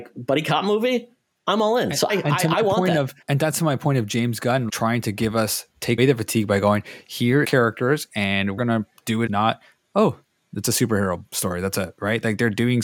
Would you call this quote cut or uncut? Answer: cut